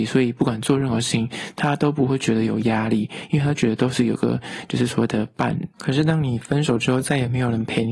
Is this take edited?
yes; 1 cut; at 5.7 s

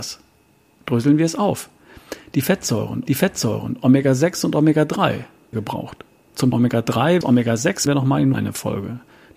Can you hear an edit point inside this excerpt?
yes; 6 cuts; at 3.1 s, 5.5 s, 6.5 s, 7.2 s, 7.9 s, 8.3 s

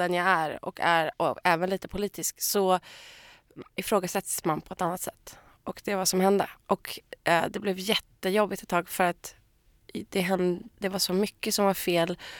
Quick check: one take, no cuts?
yes; 0 cuts

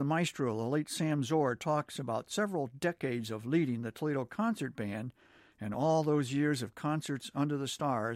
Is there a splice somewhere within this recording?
no; 0 cuts

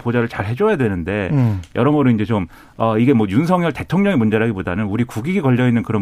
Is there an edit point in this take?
no; 0 cuts

